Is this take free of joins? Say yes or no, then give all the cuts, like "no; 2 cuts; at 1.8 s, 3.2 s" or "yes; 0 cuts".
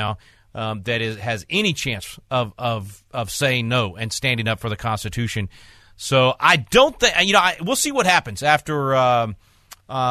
yes; 0 cuts